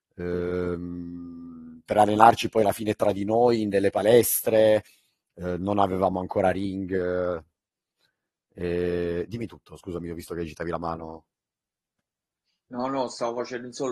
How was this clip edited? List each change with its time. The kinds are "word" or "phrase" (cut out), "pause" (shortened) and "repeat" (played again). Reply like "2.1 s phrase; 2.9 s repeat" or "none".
none